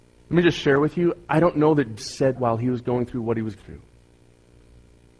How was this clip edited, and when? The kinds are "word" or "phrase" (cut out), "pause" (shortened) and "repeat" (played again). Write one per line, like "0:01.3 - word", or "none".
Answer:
0:02.0 - phrase
0:02.3 - word
0:03.6 - word